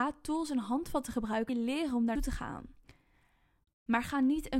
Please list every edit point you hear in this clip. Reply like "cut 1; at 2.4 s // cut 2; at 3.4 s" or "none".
cut 1; at 1.5 s // cut 2; at 2.2 s